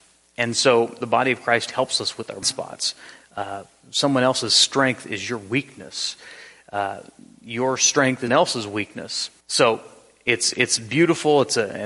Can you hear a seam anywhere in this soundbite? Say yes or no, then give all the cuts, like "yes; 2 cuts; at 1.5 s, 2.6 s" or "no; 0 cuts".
yes; 3 cuts; at 2.4 s, 8.3 s, 9.4 s